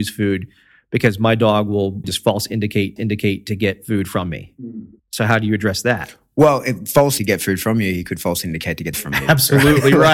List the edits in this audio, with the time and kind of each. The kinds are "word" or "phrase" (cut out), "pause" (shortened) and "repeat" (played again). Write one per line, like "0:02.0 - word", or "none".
0:02.0 - word
0:03.0 - repeat
0:05.0 - pause
0:07.2 - word
0:08.9 - phrase

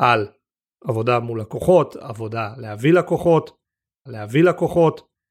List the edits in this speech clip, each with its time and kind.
0:04.1 - repeat

